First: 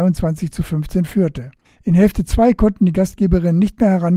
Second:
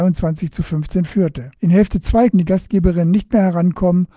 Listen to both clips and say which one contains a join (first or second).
second